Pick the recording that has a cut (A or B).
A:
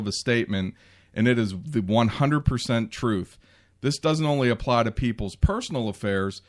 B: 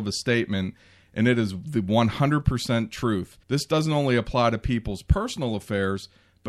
B